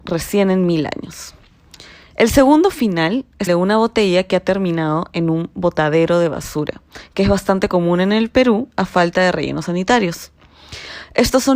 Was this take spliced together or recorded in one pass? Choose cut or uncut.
cut